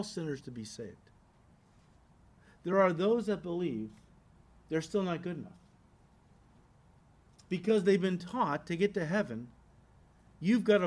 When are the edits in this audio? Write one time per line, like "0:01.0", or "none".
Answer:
none